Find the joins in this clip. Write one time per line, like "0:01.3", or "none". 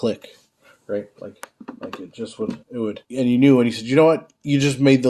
0:02.6
0:03.0